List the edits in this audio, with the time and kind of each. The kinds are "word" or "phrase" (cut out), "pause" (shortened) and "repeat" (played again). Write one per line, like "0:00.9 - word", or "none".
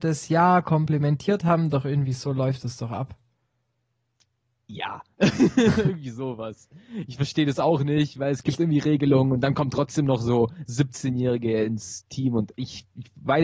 none